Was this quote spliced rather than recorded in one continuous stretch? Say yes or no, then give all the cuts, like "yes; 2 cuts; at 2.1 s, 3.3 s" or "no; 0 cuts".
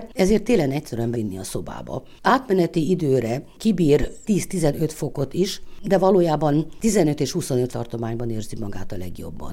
yes; 3 cuts; at 1.1 s, 4.3 s, 7.7 s